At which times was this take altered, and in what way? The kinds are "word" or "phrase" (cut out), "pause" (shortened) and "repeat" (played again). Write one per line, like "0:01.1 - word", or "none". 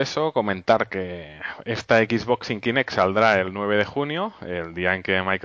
none